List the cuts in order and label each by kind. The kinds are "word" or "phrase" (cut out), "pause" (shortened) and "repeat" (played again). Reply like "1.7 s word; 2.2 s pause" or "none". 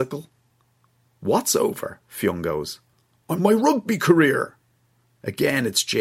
3.4 s word